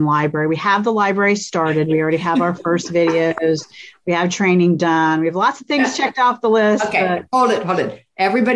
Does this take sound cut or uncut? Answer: uncut